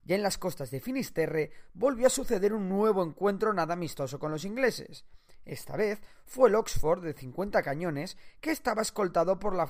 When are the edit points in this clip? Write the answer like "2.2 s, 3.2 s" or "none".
none